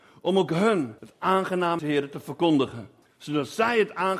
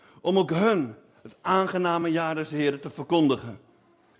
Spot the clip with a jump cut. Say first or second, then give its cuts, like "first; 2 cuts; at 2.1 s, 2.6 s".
first; 3 cuts; at 1.0 s, 1.8 s, 3.0 s